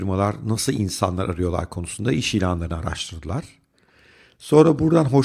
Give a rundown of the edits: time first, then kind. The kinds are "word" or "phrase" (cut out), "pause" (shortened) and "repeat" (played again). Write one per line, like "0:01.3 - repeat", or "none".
none